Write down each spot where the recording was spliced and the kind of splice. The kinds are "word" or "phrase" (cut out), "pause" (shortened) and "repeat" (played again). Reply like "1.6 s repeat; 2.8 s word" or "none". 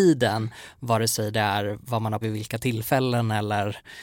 2.2 s phrase